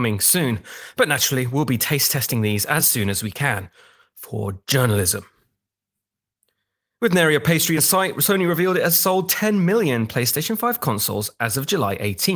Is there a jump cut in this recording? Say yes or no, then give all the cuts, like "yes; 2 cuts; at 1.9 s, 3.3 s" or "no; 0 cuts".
no; 0 cuts